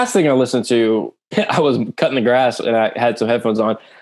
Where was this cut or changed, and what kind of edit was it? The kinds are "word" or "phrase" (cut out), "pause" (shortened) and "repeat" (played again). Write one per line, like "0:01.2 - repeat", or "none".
0:01.3 - word